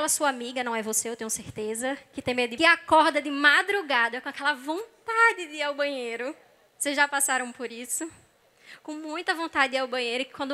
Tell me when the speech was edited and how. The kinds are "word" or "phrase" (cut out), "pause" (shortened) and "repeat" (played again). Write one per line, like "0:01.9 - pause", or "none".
0:02.6 - phrase